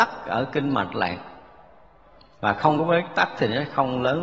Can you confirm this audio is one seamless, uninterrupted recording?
yes; 0 cuts

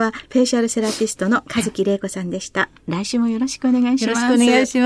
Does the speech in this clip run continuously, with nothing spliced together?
yes; 0 cuts

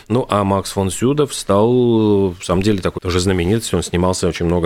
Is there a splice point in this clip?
yes; 2 cuts; at 2.4 s, 3.0 s

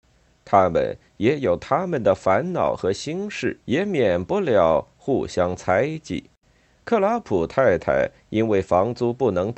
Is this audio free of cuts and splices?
no; 2 cuts; at 3.6 s, 6.4 s

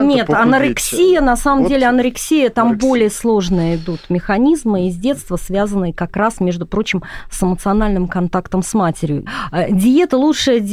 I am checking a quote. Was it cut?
no; 0 cuts

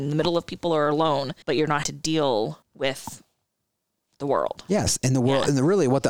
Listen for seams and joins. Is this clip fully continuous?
no; 3 cuts; at 1.4 s, 1.8 s, 2.6 s

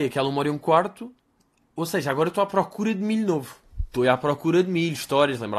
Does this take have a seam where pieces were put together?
no; 0 cuts

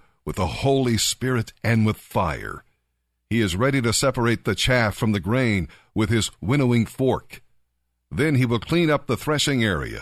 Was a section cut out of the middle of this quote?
no; 0 cuts

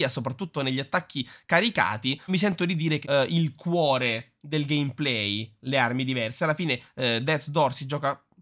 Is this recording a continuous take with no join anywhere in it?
no; 2 cuts; at 2.3 s, 3.0 s

